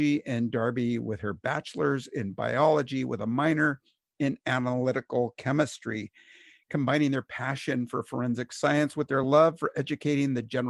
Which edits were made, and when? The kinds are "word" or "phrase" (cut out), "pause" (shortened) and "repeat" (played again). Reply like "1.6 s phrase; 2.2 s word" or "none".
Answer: none